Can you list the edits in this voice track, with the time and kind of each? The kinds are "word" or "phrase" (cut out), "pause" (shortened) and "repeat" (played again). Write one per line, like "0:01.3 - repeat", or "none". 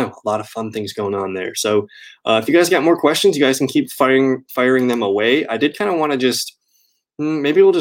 none